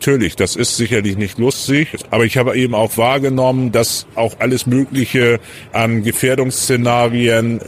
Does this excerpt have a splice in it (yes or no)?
yes